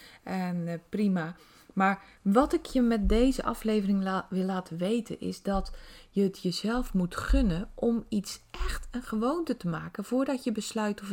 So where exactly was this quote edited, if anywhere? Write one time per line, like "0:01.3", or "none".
none

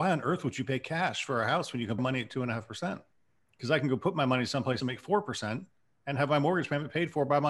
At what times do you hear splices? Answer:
0:02.0
0:03.1
0:04.8

